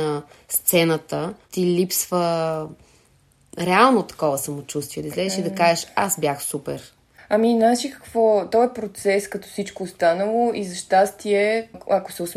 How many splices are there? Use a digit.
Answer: 1